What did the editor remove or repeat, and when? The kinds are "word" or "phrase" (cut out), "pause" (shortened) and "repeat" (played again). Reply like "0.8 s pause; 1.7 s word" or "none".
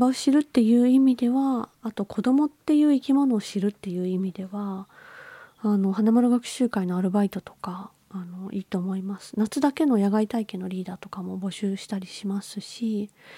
1.7 s pause